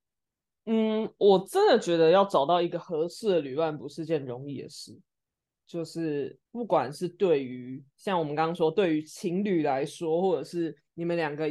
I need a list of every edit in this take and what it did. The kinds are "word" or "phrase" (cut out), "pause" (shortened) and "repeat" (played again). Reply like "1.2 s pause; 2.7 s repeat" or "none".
6.5 s pause; 7.9 s pause